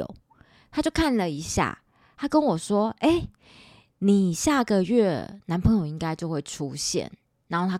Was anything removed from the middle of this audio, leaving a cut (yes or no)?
no